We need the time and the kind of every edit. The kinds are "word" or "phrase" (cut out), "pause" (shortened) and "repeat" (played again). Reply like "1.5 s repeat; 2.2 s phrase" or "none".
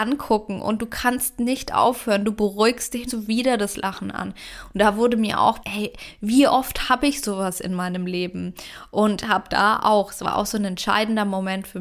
3.1 s phrase; 5.6 s word